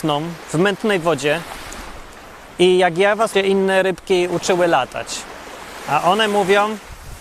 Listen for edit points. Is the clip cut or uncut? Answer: cut